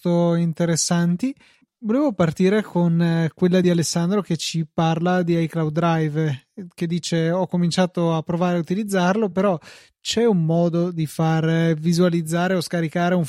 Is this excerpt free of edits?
yes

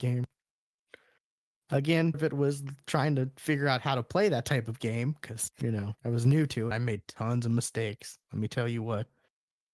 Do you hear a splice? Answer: yes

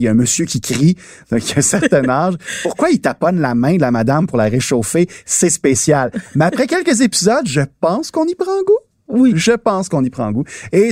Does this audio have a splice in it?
no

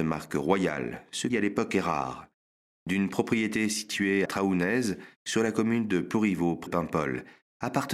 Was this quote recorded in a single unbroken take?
no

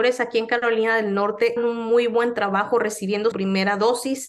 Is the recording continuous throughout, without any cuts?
no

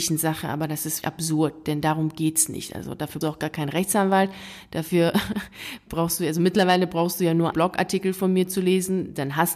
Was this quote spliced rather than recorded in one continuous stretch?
yes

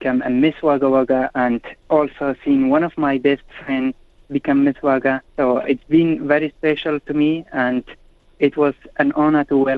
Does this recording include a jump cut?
yes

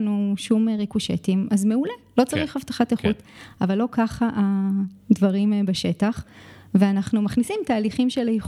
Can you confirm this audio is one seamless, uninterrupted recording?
yes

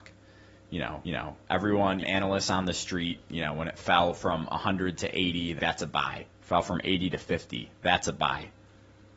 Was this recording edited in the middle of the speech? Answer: yes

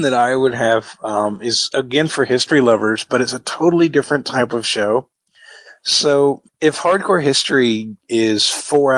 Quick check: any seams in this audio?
yes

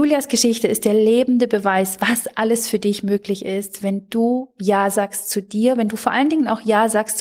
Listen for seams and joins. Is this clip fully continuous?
yes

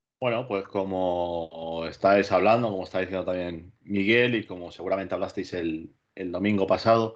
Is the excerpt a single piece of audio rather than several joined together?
yes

